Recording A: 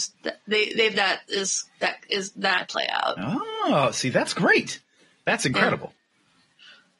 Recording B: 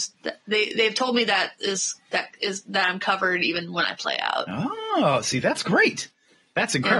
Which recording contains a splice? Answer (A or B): A